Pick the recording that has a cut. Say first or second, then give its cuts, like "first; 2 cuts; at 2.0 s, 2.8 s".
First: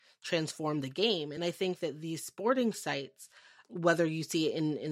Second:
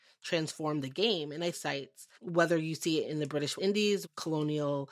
second; 4 cuts; at 1.5 s, 2.1 s, 3.0 s, 3.6 s